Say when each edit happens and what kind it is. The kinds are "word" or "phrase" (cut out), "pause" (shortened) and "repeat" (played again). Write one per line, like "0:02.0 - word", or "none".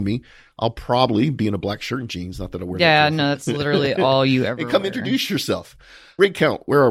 none